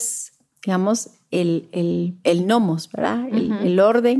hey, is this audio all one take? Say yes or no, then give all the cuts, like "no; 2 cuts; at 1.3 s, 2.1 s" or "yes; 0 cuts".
yes; 0 cuts